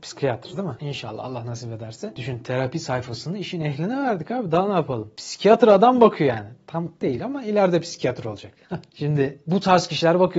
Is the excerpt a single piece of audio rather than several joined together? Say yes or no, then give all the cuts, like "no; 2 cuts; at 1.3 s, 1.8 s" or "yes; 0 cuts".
yes; 0 cuts